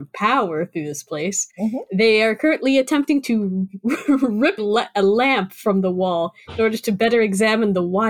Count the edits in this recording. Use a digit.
1